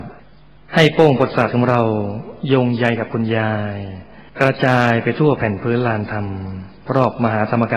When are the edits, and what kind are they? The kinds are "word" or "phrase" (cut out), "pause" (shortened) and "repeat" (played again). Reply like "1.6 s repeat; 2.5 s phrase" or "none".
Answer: 4.3 s pause